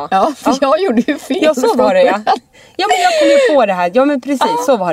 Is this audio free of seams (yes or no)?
yes